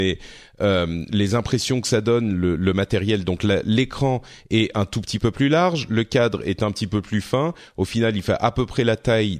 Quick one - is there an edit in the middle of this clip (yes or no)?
no